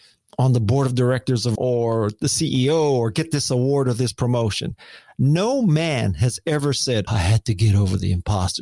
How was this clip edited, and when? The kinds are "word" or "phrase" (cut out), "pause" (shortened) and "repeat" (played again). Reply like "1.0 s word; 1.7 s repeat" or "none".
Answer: 1.6 s word; 7.1 s word